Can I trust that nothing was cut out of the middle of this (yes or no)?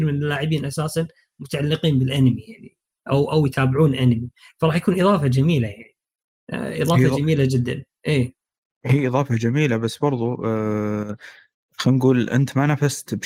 yes